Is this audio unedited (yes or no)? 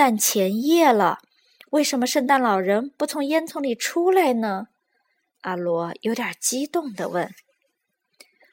yes